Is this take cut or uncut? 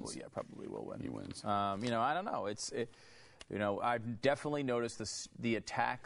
uncut